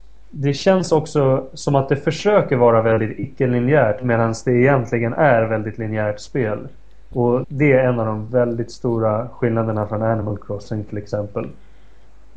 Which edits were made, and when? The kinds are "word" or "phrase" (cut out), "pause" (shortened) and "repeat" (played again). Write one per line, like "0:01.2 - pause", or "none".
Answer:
0:07.4 - word